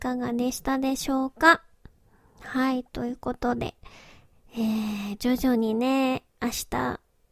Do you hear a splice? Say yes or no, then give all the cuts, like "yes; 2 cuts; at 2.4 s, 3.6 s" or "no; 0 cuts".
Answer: no; 0 cuts